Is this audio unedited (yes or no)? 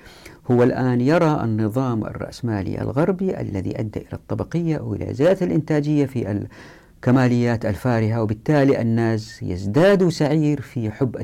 yes